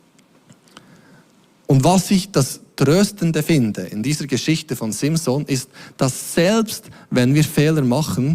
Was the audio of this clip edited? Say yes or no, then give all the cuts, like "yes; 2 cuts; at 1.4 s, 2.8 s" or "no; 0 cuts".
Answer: no; 0 cuts